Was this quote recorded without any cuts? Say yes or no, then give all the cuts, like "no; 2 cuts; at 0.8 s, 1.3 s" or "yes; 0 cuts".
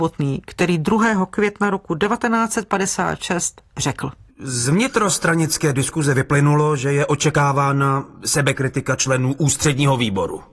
no; 2 cuts; at 4.3 s, 8.1 s